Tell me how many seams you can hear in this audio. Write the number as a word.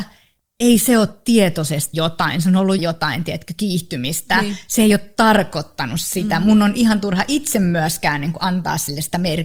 two